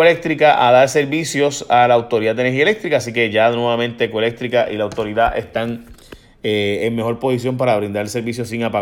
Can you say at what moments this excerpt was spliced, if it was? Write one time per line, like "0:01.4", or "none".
none